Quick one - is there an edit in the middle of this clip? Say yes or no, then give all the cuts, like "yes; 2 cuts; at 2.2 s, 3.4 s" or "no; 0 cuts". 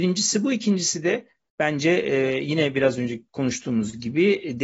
no; 0 cuts